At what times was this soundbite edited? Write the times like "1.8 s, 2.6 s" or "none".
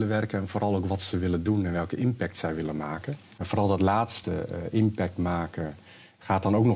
none